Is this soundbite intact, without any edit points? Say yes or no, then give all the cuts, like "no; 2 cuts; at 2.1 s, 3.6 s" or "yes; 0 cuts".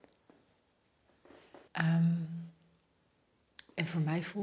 no; 1 cut; at 1.7 s